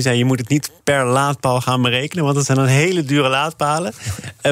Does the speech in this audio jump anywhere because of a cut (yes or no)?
no